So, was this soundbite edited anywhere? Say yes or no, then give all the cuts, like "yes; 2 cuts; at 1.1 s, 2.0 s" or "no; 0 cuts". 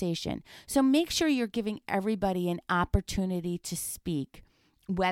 no; 0 cuts